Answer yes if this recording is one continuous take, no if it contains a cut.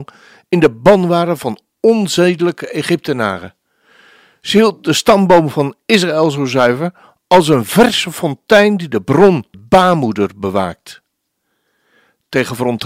no